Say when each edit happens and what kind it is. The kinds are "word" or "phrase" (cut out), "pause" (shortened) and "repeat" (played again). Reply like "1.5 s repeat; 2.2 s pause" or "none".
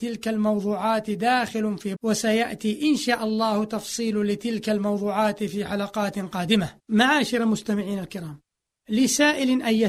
2.0 s word; 6.8 s pause

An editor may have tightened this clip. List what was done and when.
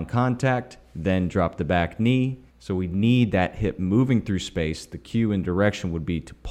2.5 s pause

